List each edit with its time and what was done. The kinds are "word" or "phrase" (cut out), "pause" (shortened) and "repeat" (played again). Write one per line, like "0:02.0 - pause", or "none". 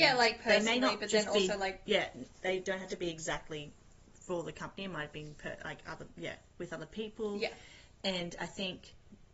0:01.9 - word